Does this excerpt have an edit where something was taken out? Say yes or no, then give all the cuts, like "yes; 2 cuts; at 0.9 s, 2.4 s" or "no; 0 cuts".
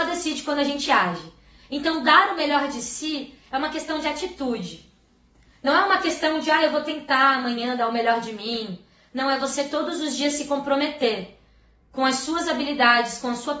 no; 0 cuts